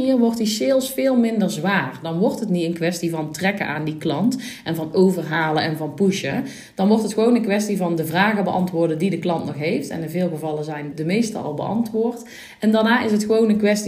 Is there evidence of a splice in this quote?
yes; 1 cut; at 10.9 s

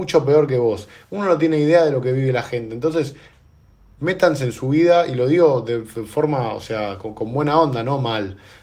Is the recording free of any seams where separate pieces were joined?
yes; 0 cuts

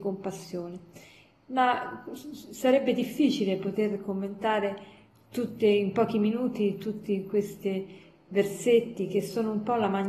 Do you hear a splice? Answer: no; 0 cuts

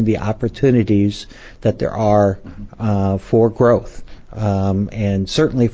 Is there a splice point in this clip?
no; 0 cuts

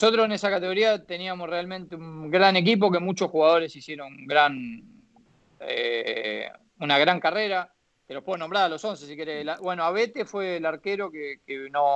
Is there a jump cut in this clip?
no; 0 cuts

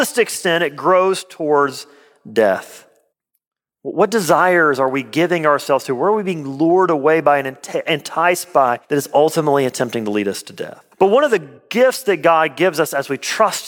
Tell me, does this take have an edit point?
yes; 4 cuts; at 3.1 s, 8.8 s, 10.9 s, 11.6 s

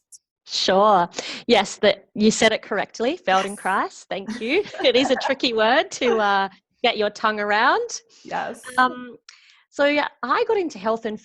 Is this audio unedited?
yes; 0 cuts

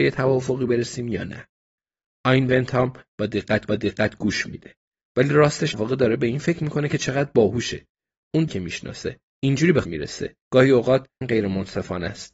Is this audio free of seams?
no; 7 cuts; at 3.7 s, 5.7 s, 8.5 s, 9.3 s, 9.8 s, 10.4 s, 11.2 s

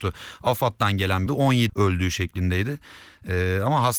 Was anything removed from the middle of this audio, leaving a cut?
yes; 2 cuts; at 1.3 s, 1.7 s

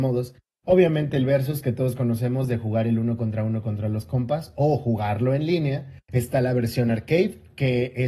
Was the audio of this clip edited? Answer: yes; 1 cut; at 6.0 s

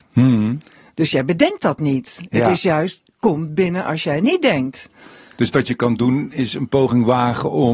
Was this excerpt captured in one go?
yes; 0 cuts

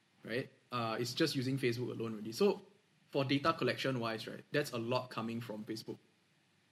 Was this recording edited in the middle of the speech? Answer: no; 0 cuts

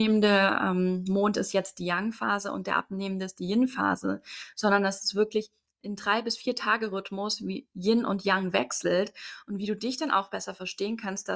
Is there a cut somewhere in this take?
no; 0 cuts

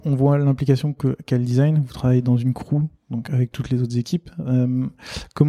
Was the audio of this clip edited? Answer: no; 0 cuts

